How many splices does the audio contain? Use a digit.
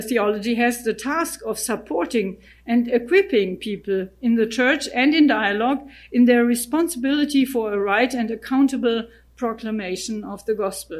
0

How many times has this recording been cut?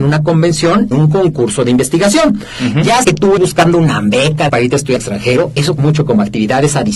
6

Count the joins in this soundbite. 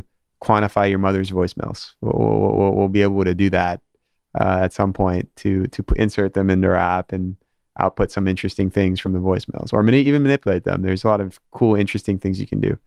0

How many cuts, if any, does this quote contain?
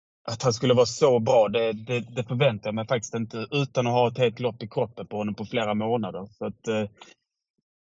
0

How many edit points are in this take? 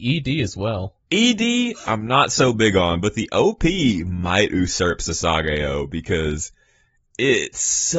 1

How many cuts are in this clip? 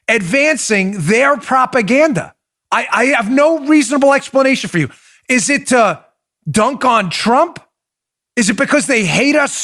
0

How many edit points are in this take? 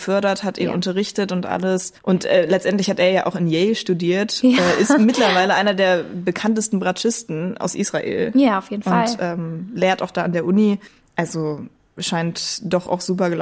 2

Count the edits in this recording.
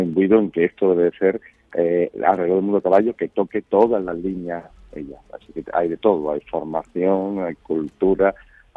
0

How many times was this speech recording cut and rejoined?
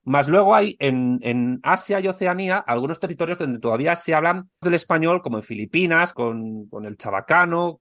2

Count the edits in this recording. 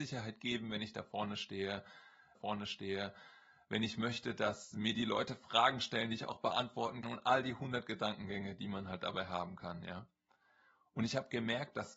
2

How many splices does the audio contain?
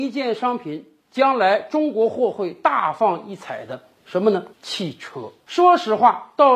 1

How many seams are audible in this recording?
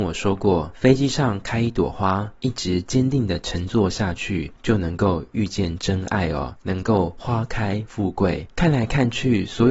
0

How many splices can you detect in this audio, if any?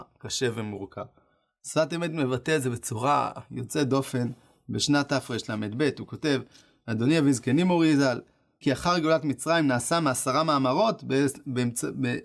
1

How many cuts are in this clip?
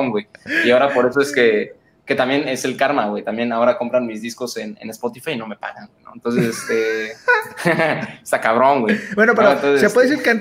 0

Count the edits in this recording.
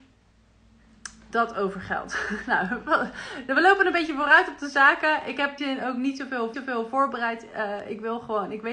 2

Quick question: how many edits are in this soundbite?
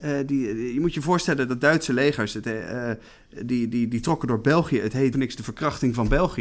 1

